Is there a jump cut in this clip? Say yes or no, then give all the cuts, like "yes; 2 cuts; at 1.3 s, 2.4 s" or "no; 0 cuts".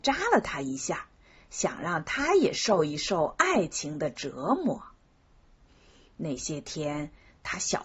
no; 0 cuts